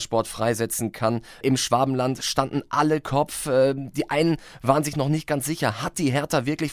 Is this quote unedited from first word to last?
yes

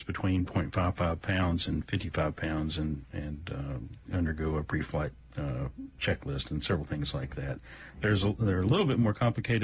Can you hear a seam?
yes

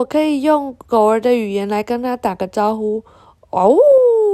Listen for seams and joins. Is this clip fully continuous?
yes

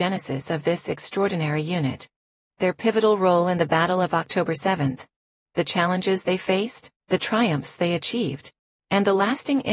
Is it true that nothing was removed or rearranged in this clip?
no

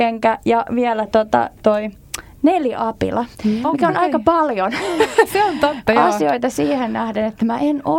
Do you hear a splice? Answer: yes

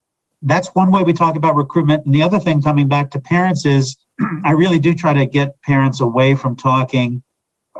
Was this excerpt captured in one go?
no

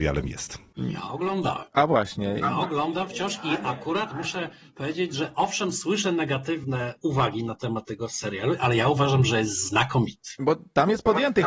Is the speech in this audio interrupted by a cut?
no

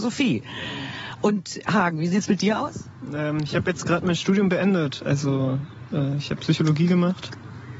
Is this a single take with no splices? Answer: yes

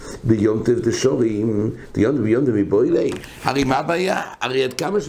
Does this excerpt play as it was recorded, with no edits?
yes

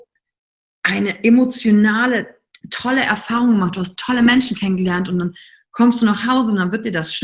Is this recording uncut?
yes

